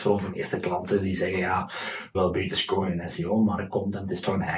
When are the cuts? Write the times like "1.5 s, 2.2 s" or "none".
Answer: 2.1 s

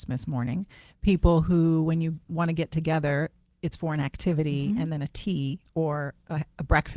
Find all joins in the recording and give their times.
2.3 s

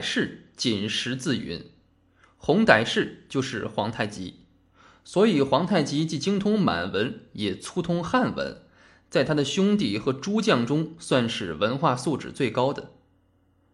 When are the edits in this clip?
none

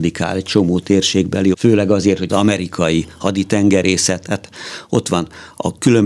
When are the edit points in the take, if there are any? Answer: 1.5 s, 2.3 s

